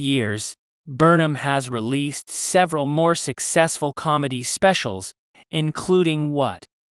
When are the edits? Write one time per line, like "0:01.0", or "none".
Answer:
none